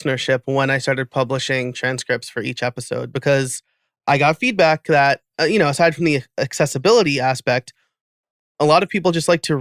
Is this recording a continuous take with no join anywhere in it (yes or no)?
yes